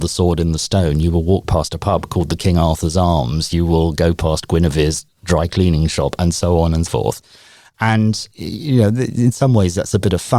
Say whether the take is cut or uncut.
cut